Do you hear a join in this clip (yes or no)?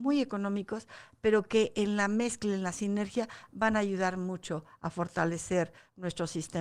no